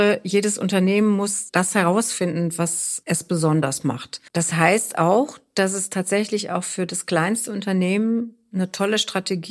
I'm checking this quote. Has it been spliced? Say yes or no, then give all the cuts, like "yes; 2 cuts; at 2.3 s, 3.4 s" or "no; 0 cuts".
yes; 1 cut; at 4.3 s